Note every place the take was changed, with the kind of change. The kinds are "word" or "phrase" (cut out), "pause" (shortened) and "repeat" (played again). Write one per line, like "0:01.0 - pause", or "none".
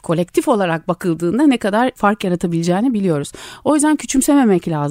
none

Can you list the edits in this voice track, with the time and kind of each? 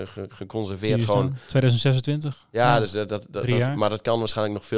none

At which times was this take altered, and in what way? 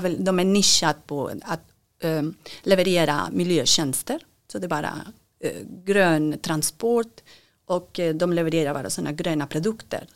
none

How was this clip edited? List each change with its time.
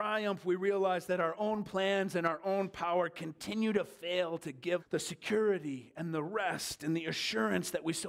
0:04.8 - word

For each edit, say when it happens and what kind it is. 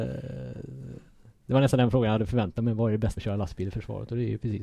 0:03.2 - word

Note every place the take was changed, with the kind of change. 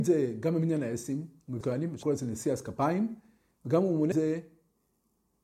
0:01.6 - phrase
0:02.0 - word
0:04.1 - word

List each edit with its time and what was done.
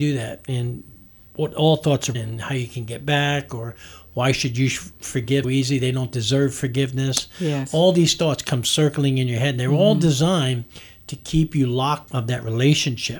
0:02.1 - word
0:05.4 - word
0:12.1 - word

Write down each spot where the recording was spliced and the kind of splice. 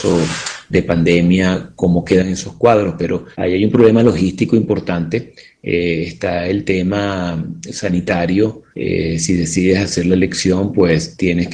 0:03.3 - pause
0:08.7 - pause

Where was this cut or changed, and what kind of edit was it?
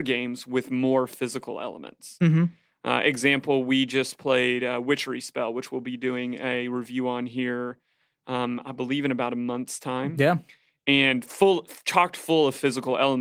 none

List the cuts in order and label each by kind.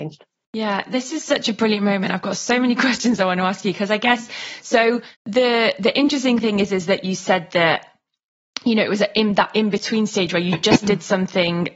0:05.1 - pause

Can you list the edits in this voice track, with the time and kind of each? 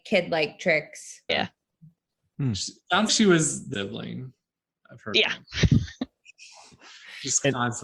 0:01.3 - word
0:03.1 - word
0:03.7 - word

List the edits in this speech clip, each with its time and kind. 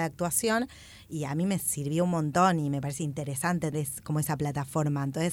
0:03.7 - word

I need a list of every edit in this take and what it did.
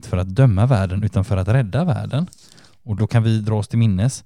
none

